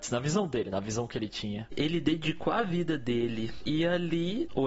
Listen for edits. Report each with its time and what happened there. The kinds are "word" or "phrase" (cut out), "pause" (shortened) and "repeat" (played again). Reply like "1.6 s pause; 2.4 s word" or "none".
3.6 s phrase

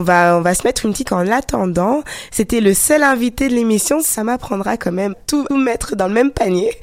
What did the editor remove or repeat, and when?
1.0 s word; 4.2 s phrase; 5.1 s word; 5.5 s phrase

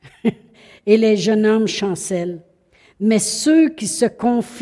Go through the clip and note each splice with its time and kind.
none

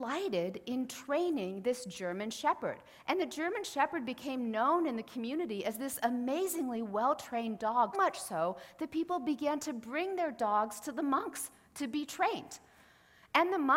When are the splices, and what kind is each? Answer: 7.9 s word

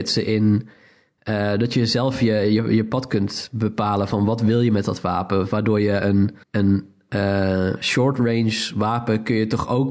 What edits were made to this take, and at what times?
6.4 s pause

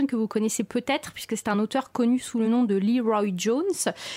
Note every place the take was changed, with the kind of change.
none

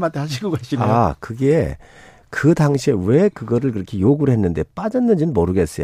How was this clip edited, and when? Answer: none

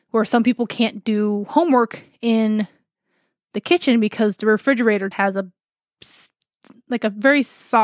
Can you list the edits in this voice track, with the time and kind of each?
5.1 s word

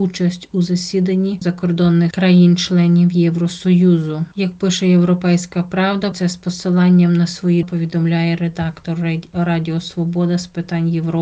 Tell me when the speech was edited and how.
1.4 s word; 2.1 s word; 6.1 s word; 7.6 s word

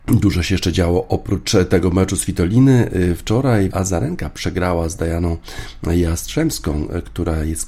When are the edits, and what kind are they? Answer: 3.7 s word

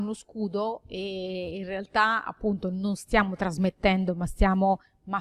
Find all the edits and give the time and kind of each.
none

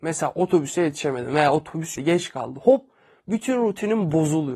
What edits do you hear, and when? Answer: 2.0 s word

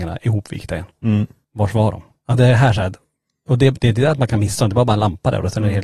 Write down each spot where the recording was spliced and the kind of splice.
none

